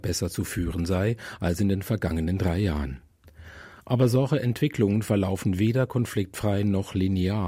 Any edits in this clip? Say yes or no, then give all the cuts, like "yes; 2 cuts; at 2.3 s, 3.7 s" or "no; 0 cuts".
no; 0 cuts